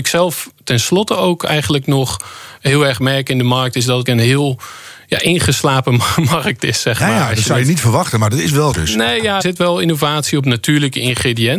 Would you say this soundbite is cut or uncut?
cut